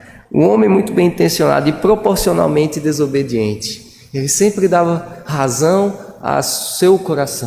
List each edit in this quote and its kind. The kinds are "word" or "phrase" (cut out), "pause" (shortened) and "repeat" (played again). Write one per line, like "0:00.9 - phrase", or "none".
none